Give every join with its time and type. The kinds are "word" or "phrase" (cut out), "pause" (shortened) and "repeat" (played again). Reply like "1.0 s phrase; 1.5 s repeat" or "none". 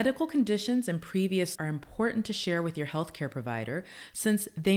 1.5 s word